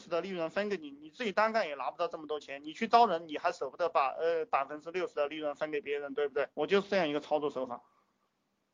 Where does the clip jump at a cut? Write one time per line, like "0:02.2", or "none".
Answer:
0:06.5